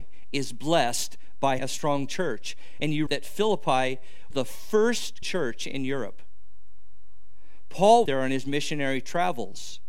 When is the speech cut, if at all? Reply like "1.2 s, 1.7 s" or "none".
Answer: 1.6 s, 3.1 s, 4.3 s, 5.2 s, 8.1 s